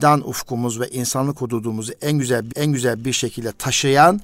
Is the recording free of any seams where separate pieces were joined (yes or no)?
no